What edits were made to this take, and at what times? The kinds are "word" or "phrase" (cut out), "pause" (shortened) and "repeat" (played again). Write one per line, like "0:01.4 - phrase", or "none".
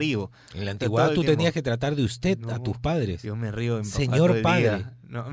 none